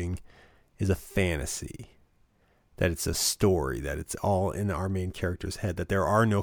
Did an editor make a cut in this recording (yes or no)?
no